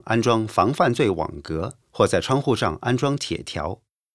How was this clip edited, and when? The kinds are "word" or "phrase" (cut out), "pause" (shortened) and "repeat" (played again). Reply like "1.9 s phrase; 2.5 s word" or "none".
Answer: 1.8 s pause